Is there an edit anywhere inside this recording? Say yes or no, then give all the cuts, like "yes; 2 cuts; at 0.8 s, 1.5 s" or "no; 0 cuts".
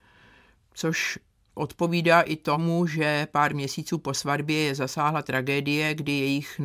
no; 0 cuts